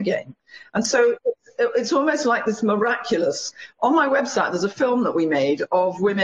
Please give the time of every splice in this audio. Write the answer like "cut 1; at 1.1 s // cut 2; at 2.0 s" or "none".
none

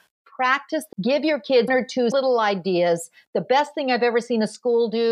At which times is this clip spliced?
cut 1; at 0.9 s // cut 2; at 1.7 s // cut 3; at 2.1 s

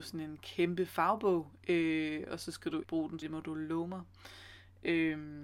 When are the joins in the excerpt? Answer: cut 1; at 2.8 s // cut 2; at 3.2 s

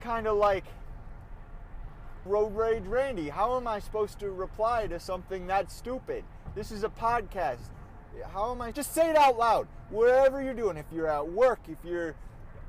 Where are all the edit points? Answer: cut 1; at 2.3 s // cut 2; at 8.7 s

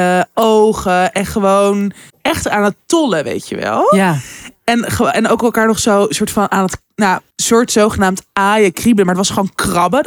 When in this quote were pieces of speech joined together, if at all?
cut 1; at 2.1 s // cut 2; at 7.3 s

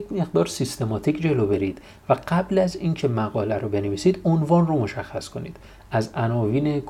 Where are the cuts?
none

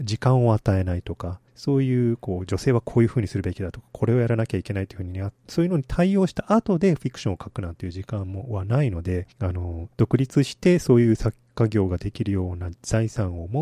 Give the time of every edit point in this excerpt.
cut 1; at 1.5 s // cut 2; at 9.3 s // cut 3; at 9.9 s

